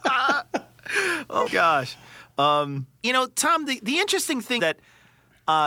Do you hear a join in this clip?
yes; 3 cuts; at 1.5 s, 3.0 s, 4.6 s

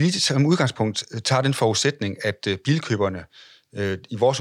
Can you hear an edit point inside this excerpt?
no; 0 cuts

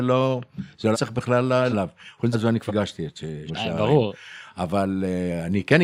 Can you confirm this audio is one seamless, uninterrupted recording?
no; 5 cuts; at 0.9 s, 1.7 s, 2.3 s, 2.7 s, 3.5 s

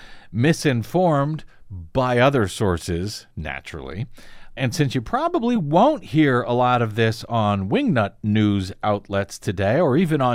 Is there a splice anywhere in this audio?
no; 0 cuts

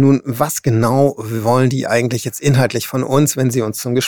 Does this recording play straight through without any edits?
yes; 0 cuts

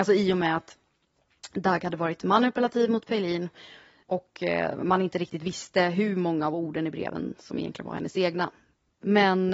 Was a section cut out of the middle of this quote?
no; 0 cuts

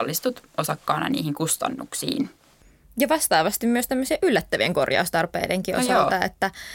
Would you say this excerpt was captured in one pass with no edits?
yes; 0 cuts

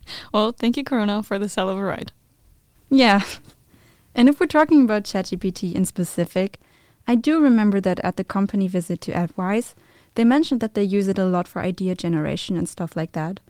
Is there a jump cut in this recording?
no; 0 cuts

